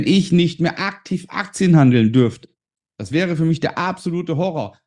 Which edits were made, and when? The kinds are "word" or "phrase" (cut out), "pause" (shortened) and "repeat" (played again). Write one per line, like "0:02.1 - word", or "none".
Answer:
none